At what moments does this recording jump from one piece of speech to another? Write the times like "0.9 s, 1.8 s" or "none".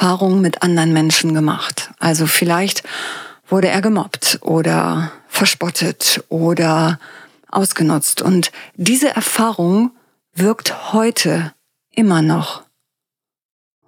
none